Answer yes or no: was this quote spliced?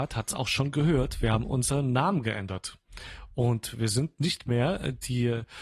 no